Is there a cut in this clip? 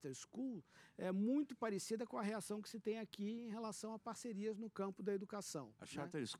no; 0 cuts

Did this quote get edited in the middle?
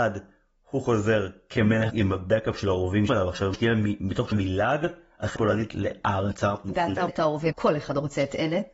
yes; 7 cuts; at 1.9 s, 3.1 s, 3.5 s, 4.3 s, 5.4 s, 7.1 s, 7.5 s

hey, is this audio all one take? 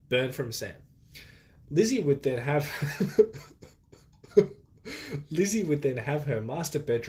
yes; 0 cuts

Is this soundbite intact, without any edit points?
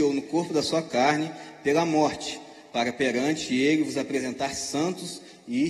yes; 0 cuts

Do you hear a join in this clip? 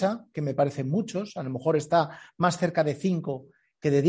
no; 0 cuts

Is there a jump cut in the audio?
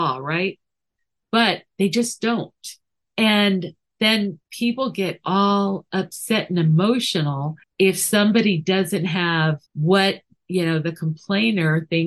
yes; 4 cuts; at 3.0 s, 4.4 s, 7.6 s, 9.7 s

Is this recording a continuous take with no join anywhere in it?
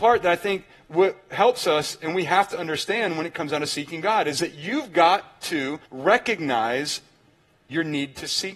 no; 1 cut; at 5.9 s

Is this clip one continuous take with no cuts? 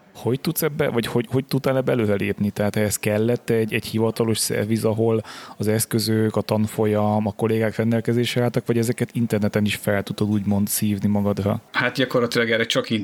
no; 1 cut; at 11.7 s

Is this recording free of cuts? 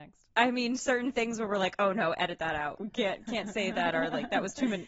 no; 1 cut; at 2.7 s

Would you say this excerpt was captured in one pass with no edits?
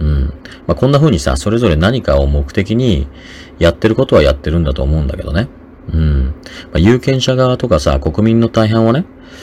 yes; 0 cuts

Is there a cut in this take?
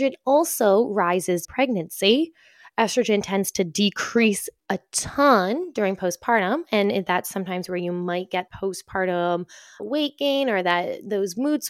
yes; 4 cuts; at 1.4 s, 4.6 s, 8.5 s, 9.8 s

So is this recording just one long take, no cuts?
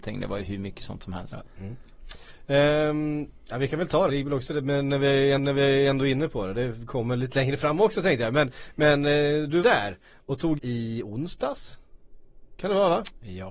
no; 4 cuts; at 4.1 s, 5.4 s, 9.6 s, 10.6 s

